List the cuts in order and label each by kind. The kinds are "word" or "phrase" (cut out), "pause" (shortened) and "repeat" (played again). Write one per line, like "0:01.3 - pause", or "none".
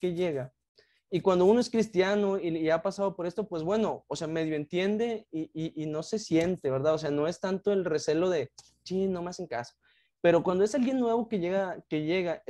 none